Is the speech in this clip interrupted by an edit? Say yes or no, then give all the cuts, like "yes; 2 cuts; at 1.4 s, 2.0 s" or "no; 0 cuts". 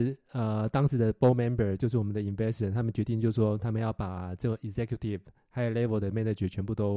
no; 0 cuts